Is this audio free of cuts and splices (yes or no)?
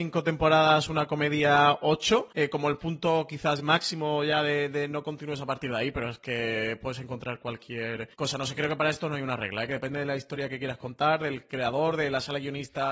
no